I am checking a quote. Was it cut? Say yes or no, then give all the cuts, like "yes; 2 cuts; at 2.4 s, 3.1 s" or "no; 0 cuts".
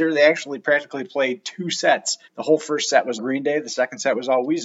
yes; 2 cuts; at 2.2 s, 3.2 s